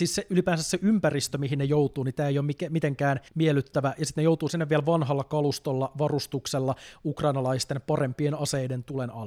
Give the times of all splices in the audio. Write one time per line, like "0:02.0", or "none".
0:03.3